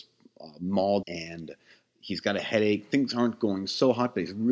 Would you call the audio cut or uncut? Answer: cut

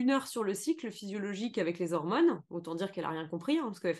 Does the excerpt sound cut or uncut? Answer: uncut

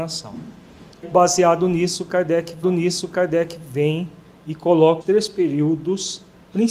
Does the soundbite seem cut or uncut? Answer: cut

